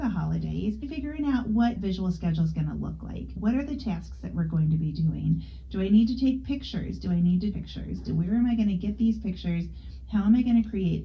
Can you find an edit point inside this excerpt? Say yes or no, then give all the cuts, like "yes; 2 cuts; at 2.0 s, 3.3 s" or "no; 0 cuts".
yes; 2 cuts; at 1.8 s, 7.5 s